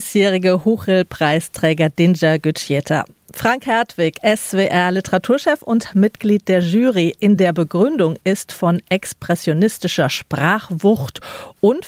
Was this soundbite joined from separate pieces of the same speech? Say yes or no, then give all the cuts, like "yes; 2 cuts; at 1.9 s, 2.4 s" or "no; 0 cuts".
no; 0 cuts